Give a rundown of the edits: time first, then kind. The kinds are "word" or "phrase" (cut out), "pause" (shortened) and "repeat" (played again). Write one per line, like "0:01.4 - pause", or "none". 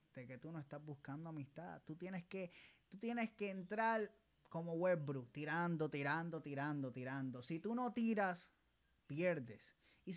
none